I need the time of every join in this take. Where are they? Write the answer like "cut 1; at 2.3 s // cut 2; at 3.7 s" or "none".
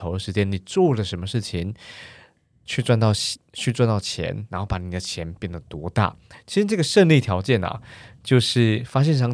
none